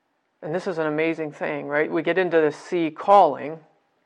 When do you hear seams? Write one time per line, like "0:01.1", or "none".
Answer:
none